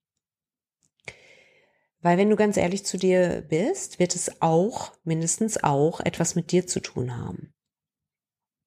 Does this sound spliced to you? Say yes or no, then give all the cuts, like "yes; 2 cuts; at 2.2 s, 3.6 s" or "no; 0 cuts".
no; 0 cuts